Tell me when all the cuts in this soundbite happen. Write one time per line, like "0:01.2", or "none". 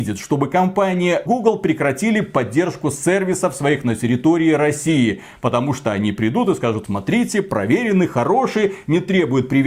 0:01.3
0:06.8